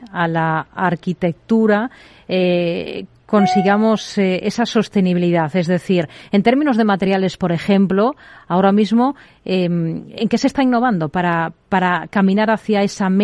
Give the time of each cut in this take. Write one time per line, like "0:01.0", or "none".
none

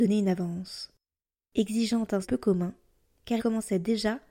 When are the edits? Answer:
0:02.2
0:03.4

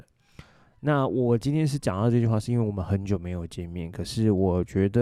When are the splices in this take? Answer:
none

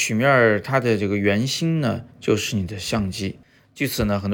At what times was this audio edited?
0:02.1

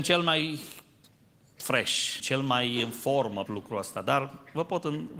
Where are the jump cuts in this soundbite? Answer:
0:02.2
0:03.5

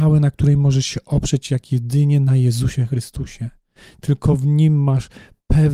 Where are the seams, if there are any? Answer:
none

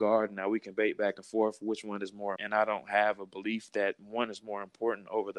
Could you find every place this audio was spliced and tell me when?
0:02.4

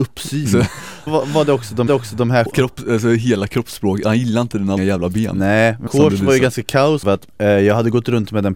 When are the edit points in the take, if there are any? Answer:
0:01.1
0:01.9
0:02.5
0:04.8
0:05.9
0:07.0

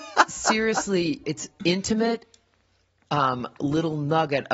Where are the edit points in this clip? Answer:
0:01.2
0:01.6

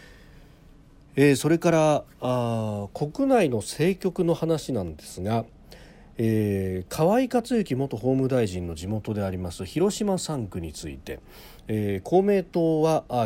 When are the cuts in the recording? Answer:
none

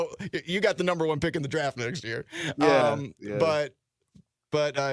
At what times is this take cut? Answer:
none

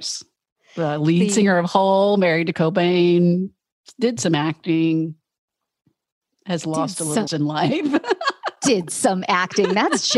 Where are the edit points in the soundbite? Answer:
0:02.5
0:07.3

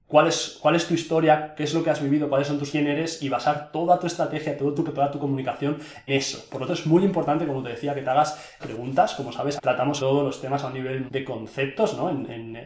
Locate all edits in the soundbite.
0:02.7
0:04.9
0:06.1
0:06.7
0:08.6
0:09.6
0:10.0
0:11.1

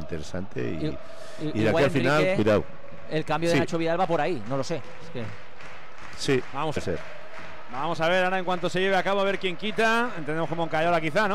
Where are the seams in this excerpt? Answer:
0:06.8

